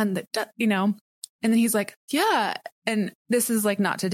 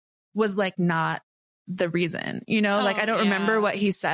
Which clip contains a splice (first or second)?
first